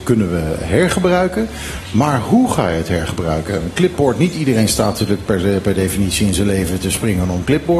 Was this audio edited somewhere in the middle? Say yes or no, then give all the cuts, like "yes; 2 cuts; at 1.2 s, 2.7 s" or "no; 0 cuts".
no; 0 cuts